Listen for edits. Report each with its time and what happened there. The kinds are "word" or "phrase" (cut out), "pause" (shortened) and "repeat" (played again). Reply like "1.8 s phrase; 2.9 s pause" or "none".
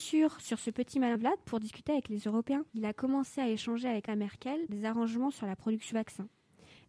1.1 s word; 2.7 s pause; 4.1 s word; 4.7 s word; 5.9 s word